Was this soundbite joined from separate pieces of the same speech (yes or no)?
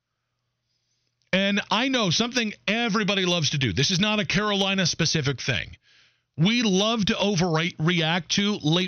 no